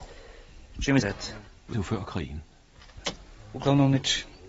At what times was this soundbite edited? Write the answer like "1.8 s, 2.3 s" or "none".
1.0 s, 1.7 s